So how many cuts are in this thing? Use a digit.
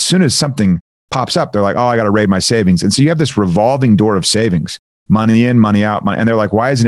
0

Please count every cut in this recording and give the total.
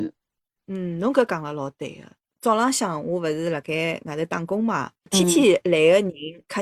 0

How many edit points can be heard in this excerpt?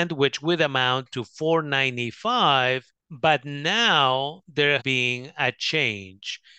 2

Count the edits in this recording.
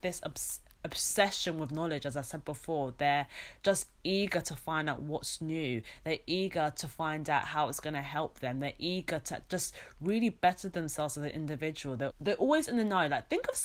1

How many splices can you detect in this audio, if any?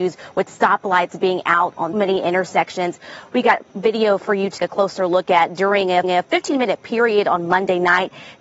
4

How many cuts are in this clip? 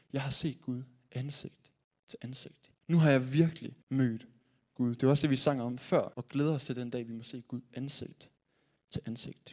3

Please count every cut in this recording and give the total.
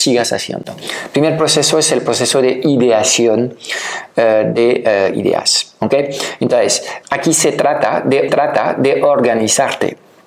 2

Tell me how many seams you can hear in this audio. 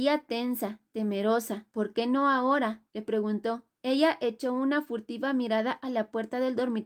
3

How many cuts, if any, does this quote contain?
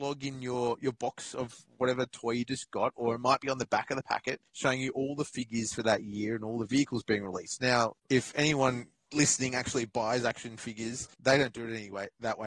3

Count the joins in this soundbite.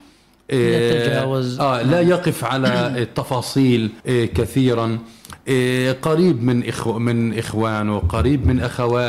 1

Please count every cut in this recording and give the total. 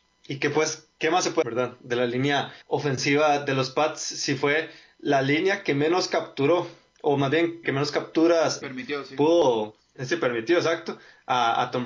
4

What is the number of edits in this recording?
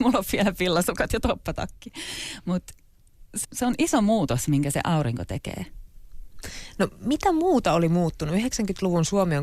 1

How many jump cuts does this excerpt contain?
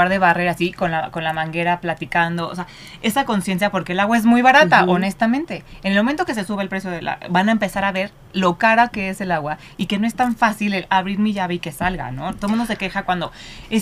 0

